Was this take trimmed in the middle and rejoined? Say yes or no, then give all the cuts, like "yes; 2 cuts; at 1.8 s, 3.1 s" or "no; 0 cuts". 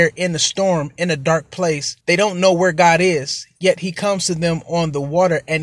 yes; 1 cut; at 2.0 s